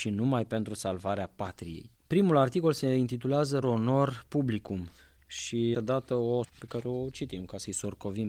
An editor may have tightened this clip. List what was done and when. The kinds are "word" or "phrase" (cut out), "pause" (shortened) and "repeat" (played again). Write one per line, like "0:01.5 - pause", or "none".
0:02.0 - pause
0:03.6 - word
0:05.7 - phrase
0:06.4 - word